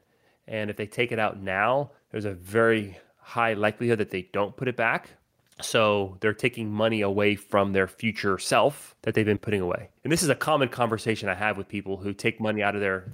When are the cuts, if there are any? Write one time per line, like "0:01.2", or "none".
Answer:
0:02.0
0:05.3
0:09.0
0:10.0